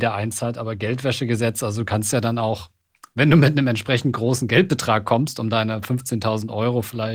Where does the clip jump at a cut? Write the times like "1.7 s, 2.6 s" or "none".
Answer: none